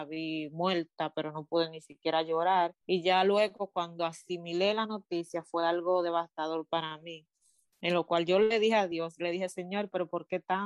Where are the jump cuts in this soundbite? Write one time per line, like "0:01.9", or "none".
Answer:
0:02.8